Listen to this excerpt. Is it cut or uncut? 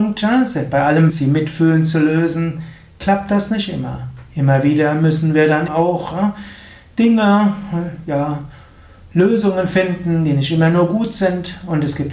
cut